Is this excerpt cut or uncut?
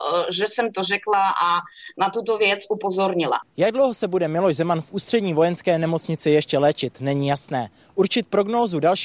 uncut